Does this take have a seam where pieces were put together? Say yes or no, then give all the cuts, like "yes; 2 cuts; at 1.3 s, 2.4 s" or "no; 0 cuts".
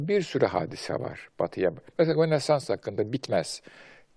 no; 0 cuts